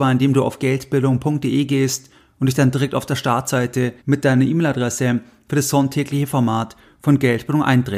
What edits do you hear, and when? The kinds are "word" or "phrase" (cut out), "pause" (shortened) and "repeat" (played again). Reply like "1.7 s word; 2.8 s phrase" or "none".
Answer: 4.0 s pause